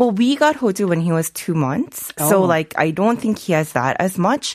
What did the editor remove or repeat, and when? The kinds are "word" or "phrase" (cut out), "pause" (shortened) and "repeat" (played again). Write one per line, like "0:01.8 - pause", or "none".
none